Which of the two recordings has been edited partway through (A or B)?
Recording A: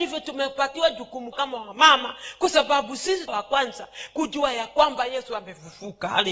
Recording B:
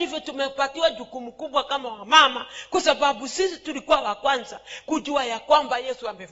A